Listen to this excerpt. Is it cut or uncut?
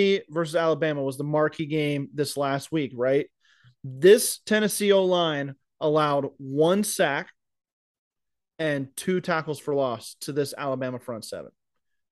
uncut